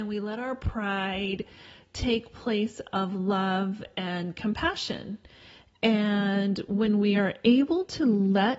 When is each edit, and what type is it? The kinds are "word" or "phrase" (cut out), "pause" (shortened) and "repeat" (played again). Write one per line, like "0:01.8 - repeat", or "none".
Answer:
none